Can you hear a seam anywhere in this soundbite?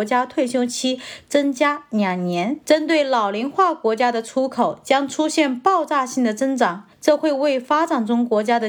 yes; 2 cuts; at 2.6 s, 6.9 s

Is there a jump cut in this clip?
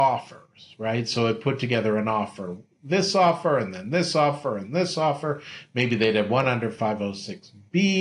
no; 0 cuts

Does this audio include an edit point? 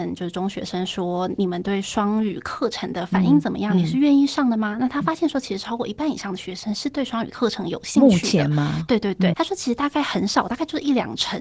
yes; 1 cut; at 9.3 s

